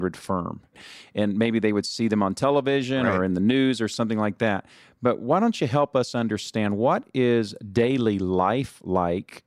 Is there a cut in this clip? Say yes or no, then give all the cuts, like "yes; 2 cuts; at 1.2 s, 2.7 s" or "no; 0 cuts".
no; 0 cuts